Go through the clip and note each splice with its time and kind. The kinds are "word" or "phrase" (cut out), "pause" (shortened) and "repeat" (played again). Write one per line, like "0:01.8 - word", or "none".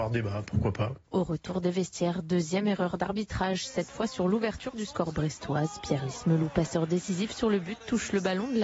none